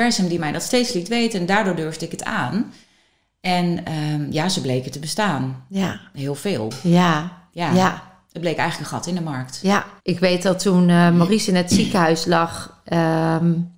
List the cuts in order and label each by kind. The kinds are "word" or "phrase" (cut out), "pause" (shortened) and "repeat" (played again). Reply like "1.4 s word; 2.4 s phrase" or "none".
10.0 s pause